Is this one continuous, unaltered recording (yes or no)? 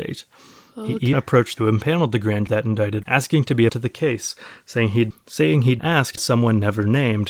no